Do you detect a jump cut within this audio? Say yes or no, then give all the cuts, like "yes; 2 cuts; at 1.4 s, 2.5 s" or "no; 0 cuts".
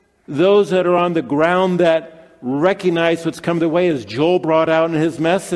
no; 0 cuts